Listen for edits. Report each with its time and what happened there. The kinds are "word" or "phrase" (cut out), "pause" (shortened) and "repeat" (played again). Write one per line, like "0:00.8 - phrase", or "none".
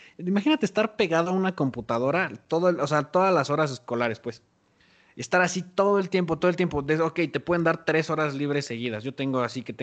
none

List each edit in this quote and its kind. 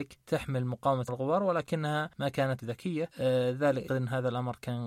0:01.1 - word
0:02.6 - phrase
0:03.9 - word

